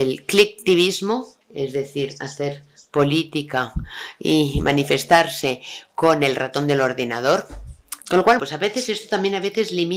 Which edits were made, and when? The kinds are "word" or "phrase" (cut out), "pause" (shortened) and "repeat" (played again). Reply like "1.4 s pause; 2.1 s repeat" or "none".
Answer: 1.4 s pause; 8.0 s pause; 8.4 s word